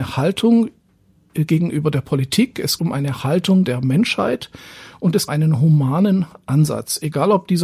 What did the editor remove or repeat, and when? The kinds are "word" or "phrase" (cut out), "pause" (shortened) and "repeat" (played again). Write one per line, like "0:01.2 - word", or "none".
0:02.8 - word
0:03.6 - word
0:05.3 - phrase